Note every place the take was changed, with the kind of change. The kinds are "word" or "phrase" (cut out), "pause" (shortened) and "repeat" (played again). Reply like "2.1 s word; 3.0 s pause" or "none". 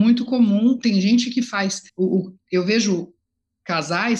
1.9 s pause